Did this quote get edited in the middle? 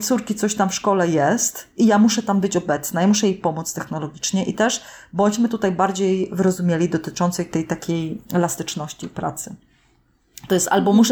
no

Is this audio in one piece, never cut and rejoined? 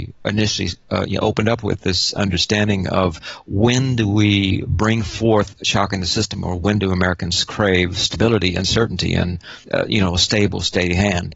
no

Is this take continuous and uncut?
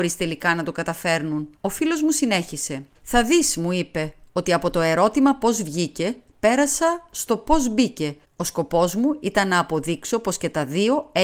no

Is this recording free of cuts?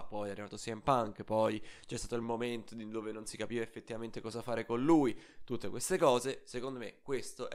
yes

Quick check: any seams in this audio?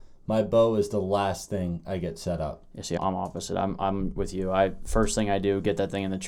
yes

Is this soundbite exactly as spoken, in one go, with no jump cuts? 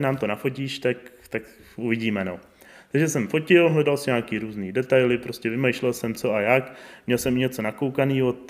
yes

